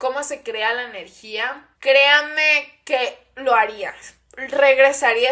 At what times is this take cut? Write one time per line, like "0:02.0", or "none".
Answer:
0:01.7